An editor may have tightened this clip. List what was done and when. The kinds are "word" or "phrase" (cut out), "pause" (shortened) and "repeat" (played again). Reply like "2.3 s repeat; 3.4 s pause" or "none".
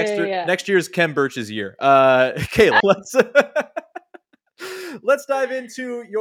2.8 s word